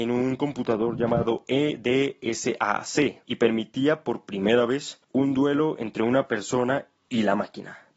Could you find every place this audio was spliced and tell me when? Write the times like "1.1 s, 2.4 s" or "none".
3.2 s, 5.0 s